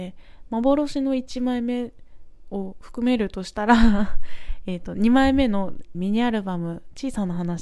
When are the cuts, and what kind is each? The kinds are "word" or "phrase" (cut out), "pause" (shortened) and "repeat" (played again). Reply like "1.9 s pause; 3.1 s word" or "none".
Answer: 5.9 s phrase